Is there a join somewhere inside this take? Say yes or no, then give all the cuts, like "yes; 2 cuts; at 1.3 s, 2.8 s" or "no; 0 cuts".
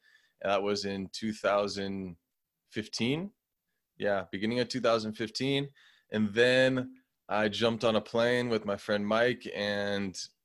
no; 0 cuts